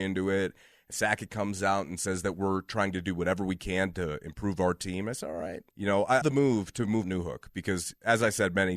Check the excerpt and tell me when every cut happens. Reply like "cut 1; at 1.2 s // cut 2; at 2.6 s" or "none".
cut 1; at 0.9 s // cut 2; at 5.7 s // cut 3; at 6.2 s // cut 4; at 7.0 s